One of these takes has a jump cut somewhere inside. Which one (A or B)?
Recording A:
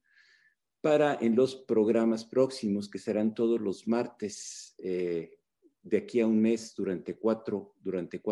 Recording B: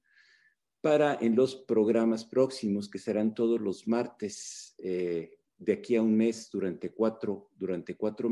B